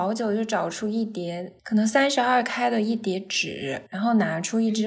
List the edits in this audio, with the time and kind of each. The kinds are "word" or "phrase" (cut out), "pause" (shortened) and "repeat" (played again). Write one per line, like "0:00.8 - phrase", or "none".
0:01.6 - pause
0:03.9 - pause